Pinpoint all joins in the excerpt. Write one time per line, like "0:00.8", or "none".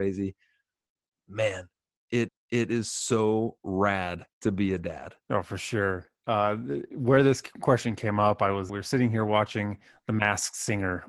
0:02.3
0:04.3
0:05.2
0:08.7
0:09.9

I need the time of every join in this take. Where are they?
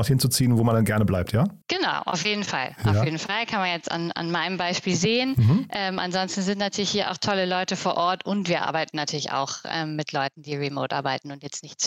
0:01.6

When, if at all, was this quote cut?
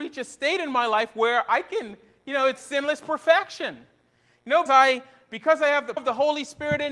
0:02.6
0:04.7
0:06.0

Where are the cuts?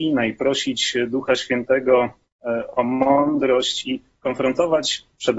none

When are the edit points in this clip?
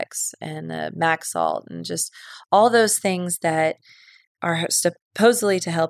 none

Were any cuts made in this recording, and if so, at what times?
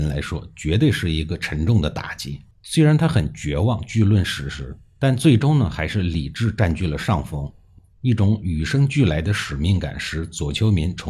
0:02.5

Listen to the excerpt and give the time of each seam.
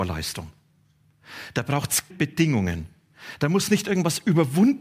0:02.1

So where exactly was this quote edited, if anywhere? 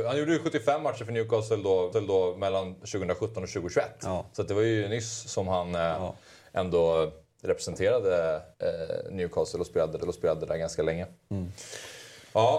0:01.9
0:08.5
0:10.0

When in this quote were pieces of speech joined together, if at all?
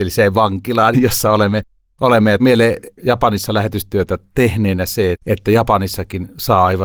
0:00.9
0:02.4
0:03.0
0:05.1

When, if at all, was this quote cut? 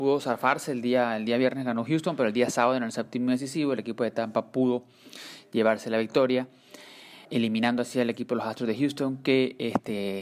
0:07.2

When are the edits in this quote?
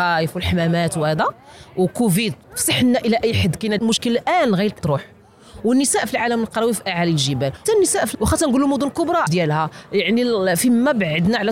0:02.4
0:03.8
0:04.8
0:07.6
0:08.1
0:09.3

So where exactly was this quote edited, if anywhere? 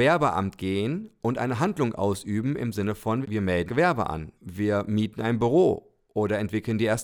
0:03.2
0:03.7
0:04.4

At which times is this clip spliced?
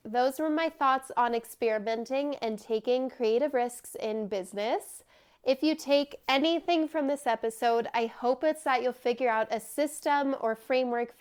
none

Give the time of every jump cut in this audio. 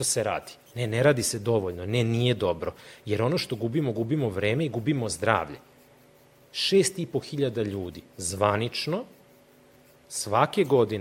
none

